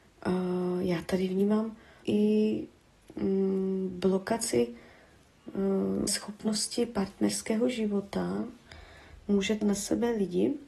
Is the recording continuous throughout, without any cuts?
no; 3 cuts; at 2.0 s, 6.1 s, 9.6 s

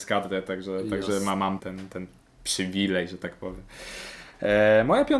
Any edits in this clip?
yes; 1 cut; at 1.6 s

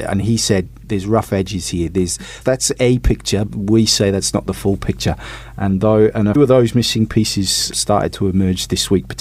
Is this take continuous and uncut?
no; 4 cuts; at 2.4 s, 3.5 s, 6.4 s, 7.7 s

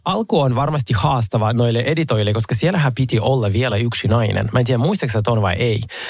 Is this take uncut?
yes; 0 cuts

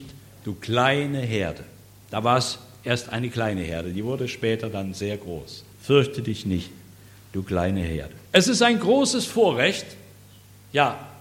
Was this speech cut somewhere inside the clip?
yes; 2 cuts; at 5.7 s, 8.3 s

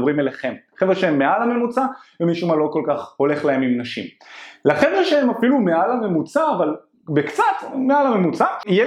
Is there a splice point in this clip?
no; 0 cuts

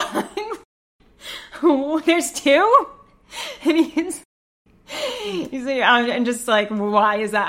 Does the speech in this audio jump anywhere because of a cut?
no; 0 cuts

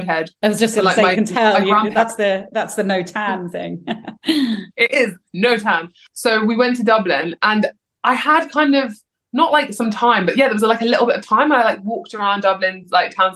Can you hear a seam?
no; 0 cuts

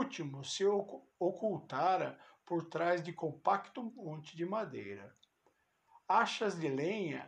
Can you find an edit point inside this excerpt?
no; 0 cuts

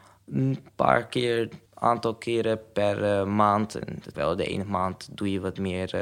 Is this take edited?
yes; 2 cuts; at 1.7 s, 4.1 s

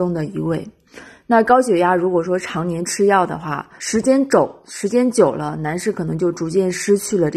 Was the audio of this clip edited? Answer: yes; 1 cut; at 3.8 s

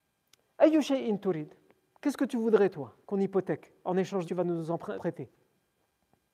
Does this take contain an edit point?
yes; 3 cuts; at 3.0 s, 4.2 s, 5.0 s

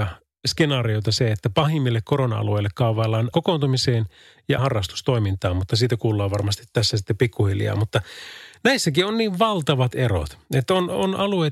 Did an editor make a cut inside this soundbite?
yes; 3 cuts; at 3.3 s, 4.6 s, 9.9 s

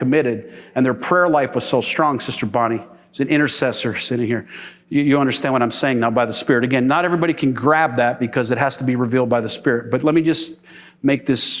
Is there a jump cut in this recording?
no; 0 cuts

